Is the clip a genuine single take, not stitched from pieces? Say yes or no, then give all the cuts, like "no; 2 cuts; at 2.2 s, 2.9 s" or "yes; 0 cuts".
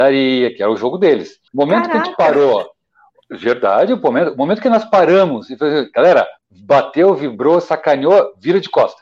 no; 2 cuts; at 1.5 s, 6.4 s